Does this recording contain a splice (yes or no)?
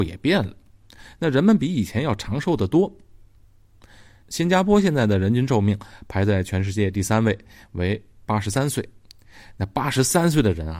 no